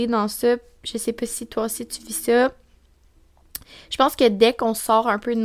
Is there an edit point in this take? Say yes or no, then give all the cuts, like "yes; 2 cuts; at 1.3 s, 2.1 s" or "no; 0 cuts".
no; 0 cuts